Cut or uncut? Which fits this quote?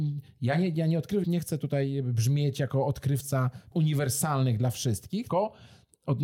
cut